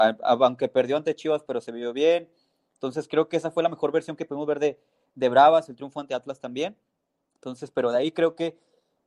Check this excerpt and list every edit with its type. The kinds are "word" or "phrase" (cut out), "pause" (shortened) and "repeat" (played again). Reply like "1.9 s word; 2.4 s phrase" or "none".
none